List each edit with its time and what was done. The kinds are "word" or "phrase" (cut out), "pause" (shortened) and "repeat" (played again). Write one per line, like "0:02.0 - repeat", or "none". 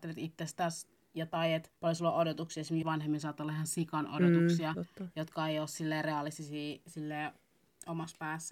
0:01.8 - pause
0:02.8 - word
0:04.7 - word

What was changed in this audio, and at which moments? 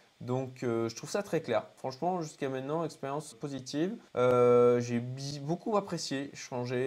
0:03.3 - word
0:04.1 - pause

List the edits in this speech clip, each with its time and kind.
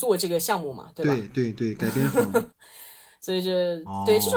0:02.5 - pause

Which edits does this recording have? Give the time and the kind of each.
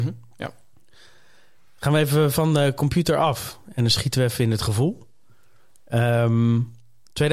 none

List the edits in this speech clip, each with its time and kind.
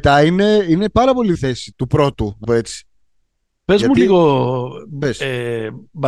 0:01.3 - word
0:01.7 - word
0:02.4 - word

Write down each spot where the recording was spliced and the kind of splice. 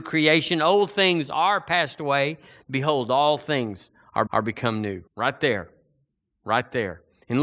0:04.3 - repeat
0:05.1 - pause

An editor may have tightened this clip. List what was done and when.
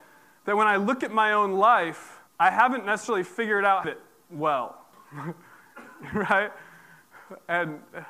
0:02.3 - pause
0:03.8 - phrase
0:04.9 - pause

